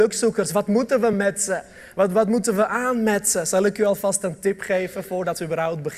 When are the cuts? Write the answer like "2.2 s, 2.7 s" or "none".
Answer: none